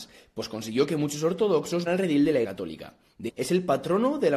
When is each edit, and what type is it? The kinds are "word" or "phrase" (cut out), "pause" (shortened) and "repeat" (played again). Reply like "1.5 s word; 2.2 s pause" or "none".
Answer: 1.9 s word; 2.4 s word; 3.3 s word